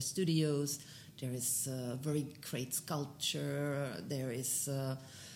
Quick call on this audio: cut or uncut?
uncut